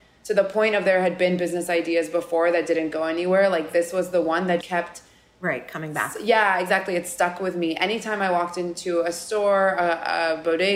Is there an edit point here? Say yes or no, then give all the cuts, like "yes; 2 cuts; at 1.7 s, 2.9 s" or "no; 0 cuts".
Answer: yes; 1 cut; at 4.6 s